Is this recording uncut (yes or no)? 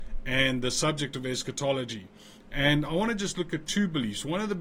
yes